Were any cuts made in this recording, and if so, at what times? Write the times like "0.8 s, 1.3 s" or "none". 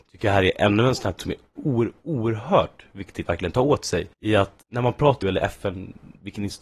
1.2 s, 1.6 s, 3.3 s, 4.1 s, 4.6 s, 5.2 s